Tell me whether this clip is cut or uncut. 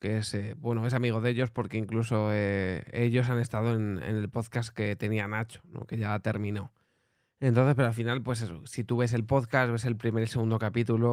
uncut